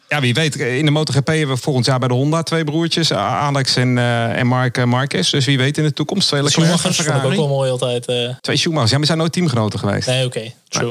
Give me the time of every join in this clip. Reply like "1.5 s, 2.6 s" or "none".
8.4 s